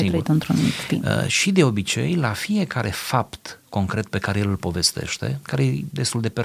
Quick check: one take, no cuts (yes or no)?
yes